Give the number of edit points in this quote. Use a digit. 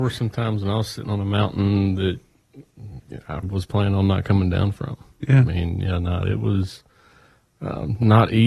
1